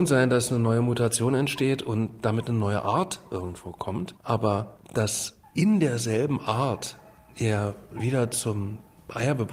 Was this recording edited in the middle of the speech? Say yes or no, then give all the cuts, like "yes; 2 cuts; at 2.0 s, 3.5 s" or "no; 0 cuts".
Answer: yes; 1 cut; at 4.2 s